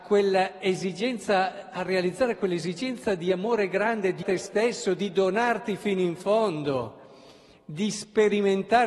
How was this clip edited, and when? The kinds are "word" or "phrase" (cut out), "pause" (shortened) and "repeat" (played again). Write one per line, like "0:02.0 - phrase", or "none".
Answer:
0:04.2 - phrase

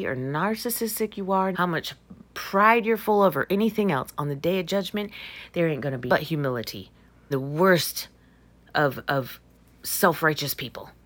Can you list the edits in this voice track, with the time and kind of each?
0:01.5 - word
0:06.1 - word
0:07.3 - word

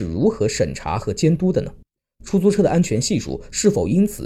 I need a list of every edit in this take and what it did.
none

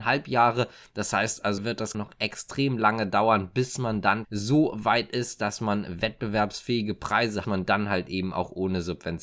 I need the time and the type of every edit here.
0:01.6 - word
0:01.9 - phrase
0:04.2 - word
0:07.4 - phrase

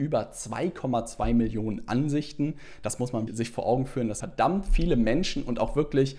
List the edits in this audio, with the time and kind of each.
0:03.3 - word
0:04.2 - word

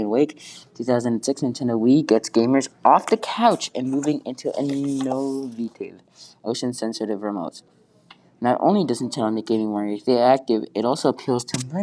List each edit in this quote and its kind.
none

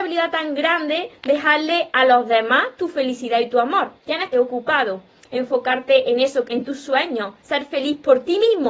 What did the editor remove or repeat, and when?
0:04.0 - pause
0:04.3 - word
0:06.4 - phrase
0:07.4 - pause

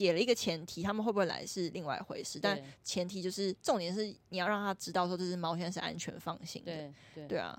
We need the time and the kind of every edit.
0:03.6 - pause

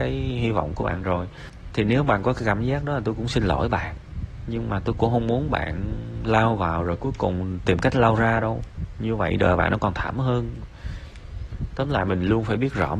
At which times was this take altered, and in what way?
none

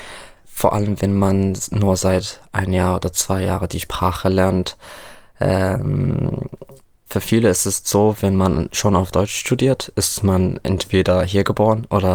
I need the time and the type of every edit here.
0:07.0 - pause

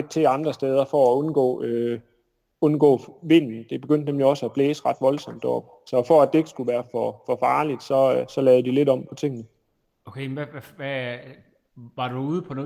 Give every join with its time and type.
none

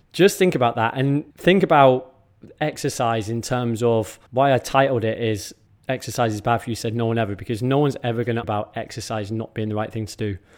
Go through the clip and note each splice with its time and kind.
0:01.3 - pause
0:04.3 - pause
0:05.7 - pause
0:08.4 - word

